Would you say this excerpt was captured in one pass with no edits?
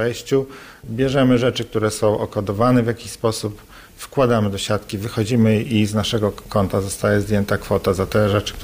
yes; 0 cuts

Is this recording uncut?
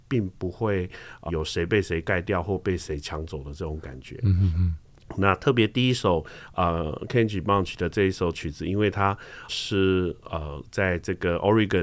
no; 2 cuts; at 1.3 s, 9.5 s

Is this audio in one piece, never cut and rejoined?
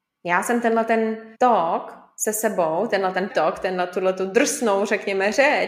no; 2 cuts; at 1.3 s, 3.3 s

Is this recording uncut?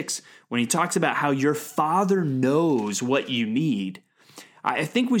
yes; 0 cuts

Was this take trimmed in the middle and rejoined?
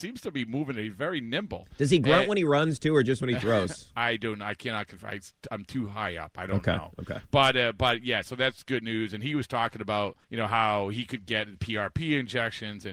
yes; 1 cut; at 10.2 s

